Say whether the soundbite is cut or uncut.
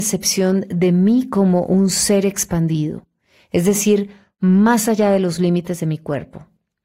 uncut